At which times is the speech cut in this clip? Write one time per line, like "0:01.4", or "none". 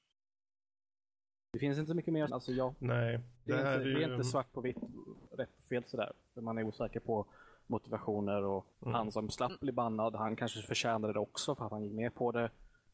0:02.3
0:03.5
0:08.7